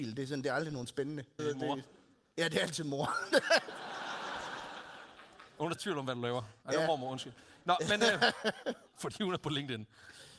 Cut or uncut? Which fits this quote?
cut